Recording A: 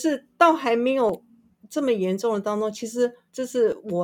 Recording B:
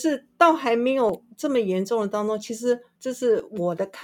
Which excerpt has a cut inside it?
B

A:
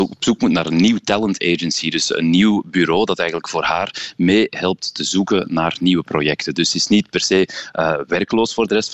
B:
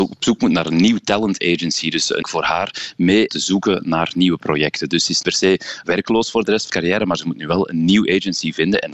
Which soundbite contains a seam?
B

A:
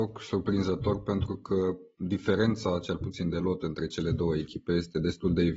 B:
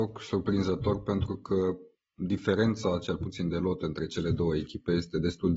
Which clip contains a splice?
A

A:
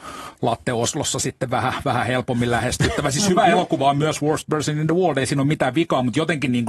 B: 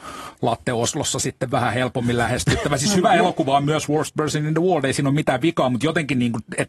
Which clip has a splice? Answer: B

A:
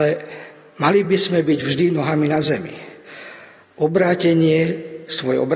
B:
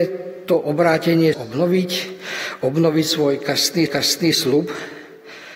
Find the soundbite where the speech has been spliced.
B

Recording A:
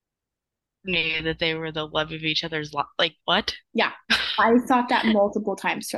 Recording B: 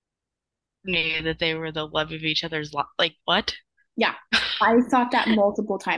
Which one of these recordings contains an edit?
A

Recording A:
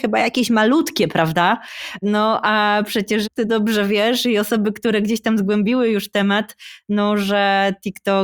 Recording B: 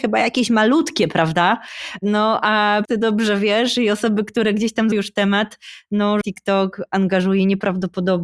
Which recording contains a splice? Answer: B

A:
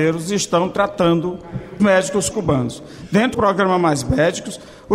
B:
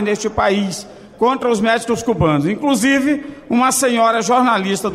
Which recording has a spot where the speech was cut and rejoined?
A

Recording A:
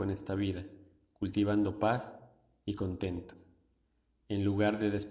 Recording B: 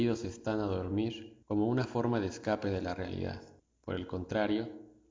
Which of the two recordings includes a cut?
B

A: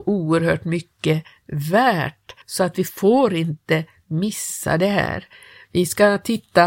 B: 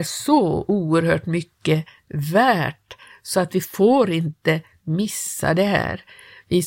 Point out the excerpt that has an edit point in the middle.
A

